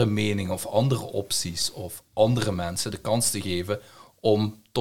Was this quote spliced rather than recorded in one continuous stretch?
no; 0 cuts

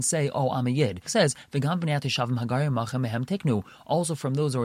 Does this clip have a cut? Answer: yes; 1 cut; at 1.1 s

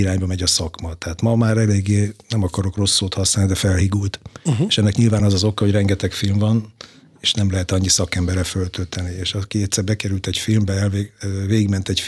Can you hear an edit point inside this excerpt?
no; 0 cuts

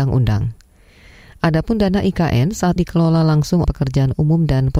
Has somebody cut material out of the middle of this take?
yes; 2 cuts; at 2.8 s, 3.6 s

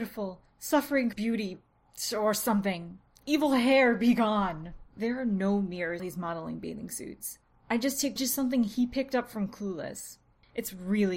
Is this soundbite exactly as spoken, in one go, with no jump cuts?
no; 4 cuts; at 1.1 s, 4.9 s, 6.0 s, 8.2 s

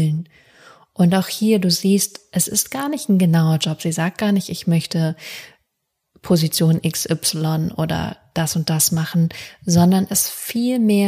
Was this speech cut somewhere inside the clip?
no; 0 cuts

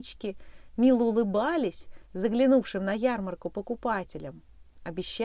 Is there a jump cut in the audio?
no; 0 cuts

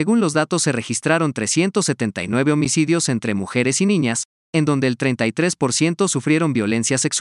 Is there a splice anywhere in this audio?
no; 0 cuts

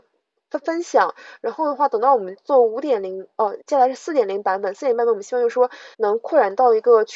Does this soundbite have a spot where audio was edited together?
yes; 2 cuts; at 3.6 s, 5.9 s

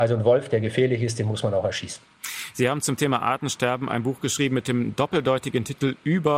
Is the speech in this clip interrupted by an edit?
no; 0 cuts

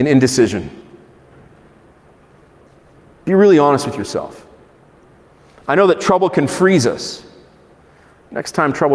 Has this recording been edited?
no; 0 cuts

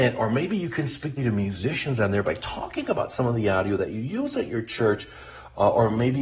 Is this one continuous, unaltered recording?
no; 1 cut; at 1.2 s

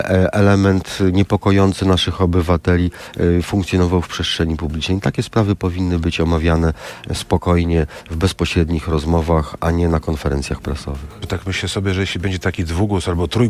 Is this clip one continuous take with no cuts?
yes; 0 cuts

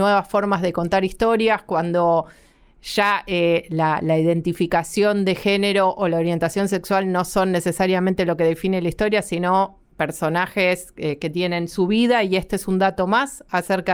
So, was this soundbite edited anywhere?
no; 0 cuts

